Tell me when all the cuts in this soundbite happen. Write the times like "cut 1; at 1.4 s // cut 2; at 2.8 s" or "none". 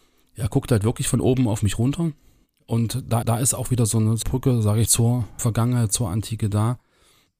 cut 1; at 3.2 s // cut 2; at 4.2 s // cut 3; at 4.9 s // cut 4; at 5.4 s